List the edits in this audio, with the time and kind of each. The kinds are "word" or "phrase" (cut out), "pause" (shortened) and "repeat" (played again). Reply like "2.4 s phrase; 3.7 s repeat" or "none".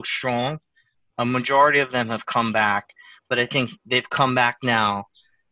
none